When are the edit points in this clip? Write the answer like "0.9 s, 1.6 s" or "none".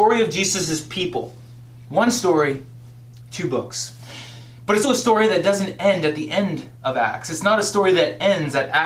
4.8 s